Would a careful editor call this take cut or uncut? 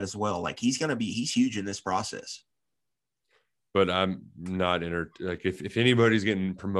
uncut